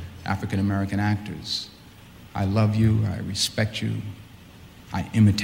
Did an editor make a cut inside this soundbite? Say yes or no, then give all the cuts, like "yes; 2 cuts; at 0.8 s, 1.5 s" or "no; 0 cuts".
no; 0 cuts